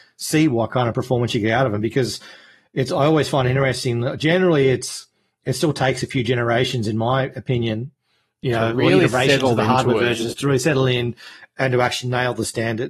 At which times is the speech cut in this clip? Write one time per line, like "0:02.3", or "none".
none